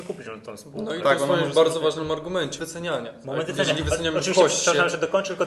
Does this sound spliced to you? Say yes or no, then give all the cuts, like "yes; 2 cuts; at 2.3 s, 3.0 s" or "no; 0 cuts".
yes; 1 cut; at 2.6 s